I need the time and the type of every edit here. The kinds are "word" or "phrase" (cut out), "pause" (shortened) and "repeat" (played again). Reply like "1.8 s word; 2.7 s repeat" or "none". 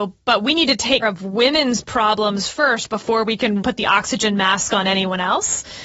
1.0 s word; 3.6 s word